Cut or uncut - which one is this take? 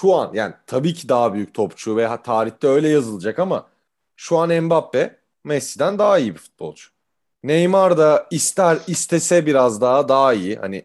uncut